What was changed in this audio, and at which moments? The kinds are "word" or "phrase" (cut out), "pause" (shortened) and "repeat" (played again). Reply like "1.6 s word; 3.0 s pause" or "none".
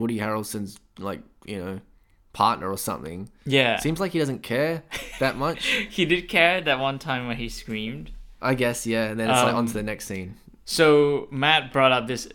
none

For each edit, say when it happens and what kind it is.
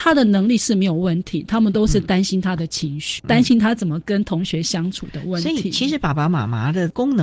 3.2 s word

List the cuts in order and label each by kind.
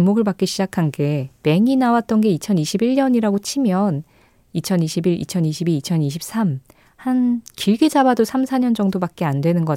none

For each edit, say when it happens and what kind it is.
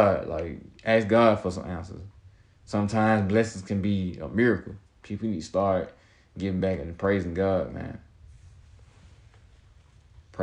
none

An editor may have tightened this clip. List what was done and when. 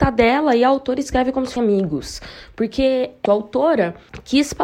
1.6 s word; 3.3 s word

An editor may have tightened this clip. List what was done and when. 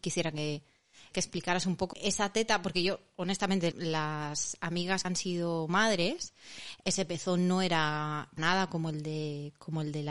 1.1 s word; 1.9 s word; 3.7 s word; 5.0 s word; 6.8 s word; 8.4 s word

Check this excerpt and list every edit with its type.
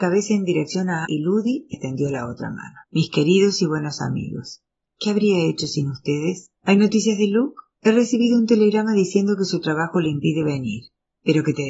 1.0 s word; 1.7 s word; 2.8 s pause; 6.5 s pause; 7.7 s pause

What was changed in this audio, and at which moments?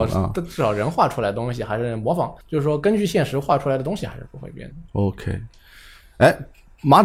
2.4 s pause

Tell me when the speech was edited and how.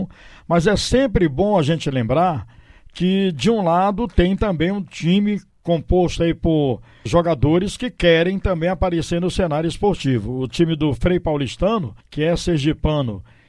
7.1 s word; 12.0 s pause

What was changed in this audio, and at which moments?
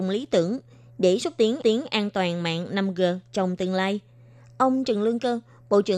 1.6 s repeat

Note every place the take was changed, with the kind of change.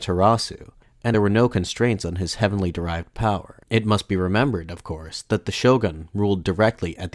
1.1 s phrase; 3.6 s pause

